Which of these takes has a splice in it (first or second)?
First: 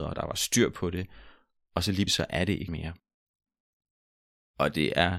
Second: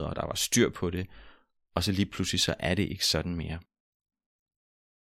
first